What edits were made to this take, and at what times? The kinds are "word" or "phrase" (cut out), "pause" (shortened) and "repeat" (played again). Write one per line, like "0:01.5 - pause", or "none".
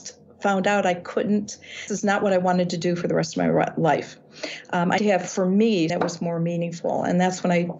0:01.9 - word
0:05.0 - word
0:05.9 - word